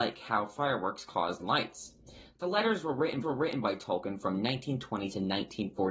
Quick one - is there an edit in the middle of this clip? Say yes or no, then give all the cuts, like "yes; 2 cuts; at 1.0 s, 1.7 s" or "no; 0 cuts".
yes; 2 cuts; at 1.4 s, 3.2 s